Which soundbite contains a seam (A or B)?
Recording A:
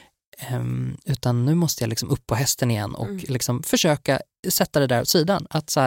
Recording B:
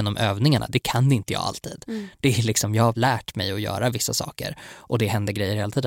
B